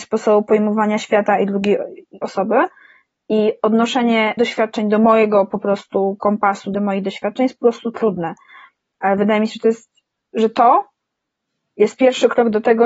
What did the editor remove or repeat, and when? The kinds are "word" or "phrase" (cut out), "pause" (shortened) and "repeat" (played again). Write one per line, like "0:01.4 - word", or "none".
0:02.2 - phrase
0:04.4 - word
0:06.7 - phrase

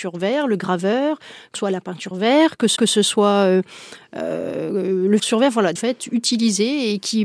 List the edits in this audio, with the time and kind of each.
0:01.5 - word
0:02.1 - word
0:02.8 - repeat
0:05.2 - word
0:05.8 - phrase

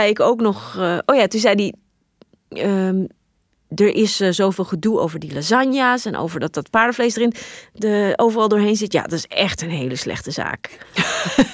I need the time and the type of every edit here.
none

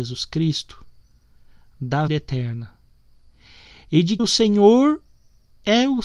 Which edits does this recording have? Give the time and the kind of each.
0:02.1 - word
0:04.2 - word

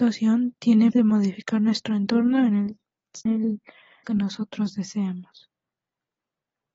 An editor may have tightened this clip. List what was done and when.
0:00.9 - word
0:03.3 - word
0:04.0 - word

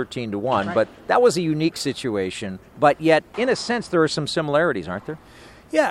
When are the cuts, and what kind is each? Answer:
0:02.6 - pause
0:03.3 - word

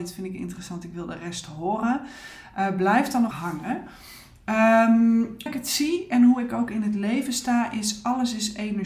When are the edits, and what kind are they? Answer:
0:03.3 - word
0:05.5 - word

